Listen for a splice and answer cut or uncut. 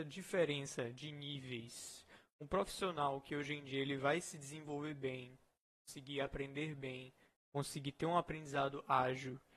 uncut